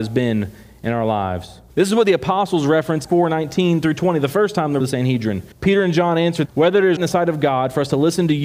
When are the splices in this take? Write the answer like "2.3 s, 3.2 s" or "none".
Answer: 1.7 s, 3.0 s, 4.8 s, 5.5 s, 6.4 s, 7.0 s